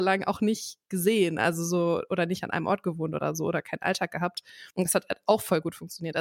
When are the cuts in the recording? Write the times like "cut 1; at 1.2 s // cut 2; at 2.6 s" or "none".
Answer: cut 1; at 4.7 s